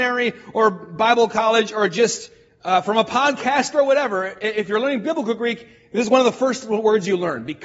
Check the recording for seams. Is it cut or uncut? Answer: uncut